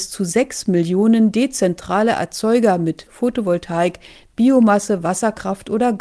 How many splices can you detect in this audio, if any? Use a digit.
1